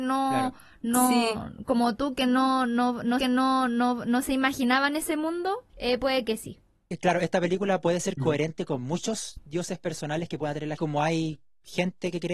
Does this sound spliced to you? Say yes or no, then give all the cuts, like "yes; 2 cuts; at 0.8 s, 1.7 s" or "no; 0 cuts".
yes; 3 cuts; at 3.2 s, 5.7 s, 10.8 s